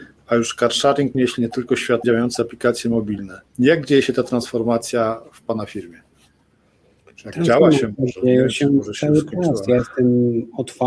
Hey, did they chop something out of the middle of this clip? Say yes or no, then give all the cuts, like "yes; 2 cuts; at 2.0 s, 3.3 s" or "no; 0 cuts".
yes; 3 cuts; at 1.1 s, 2.0 s, 3.5 s